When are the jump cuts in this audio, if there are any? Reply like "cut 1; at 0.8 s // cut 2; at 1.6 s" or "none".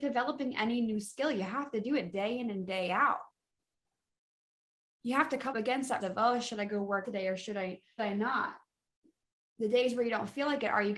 cut 1; at 5.5 s // cut 2; at 6.0 s // cut 3; at 7.0 s // cut 4; at 8.0 s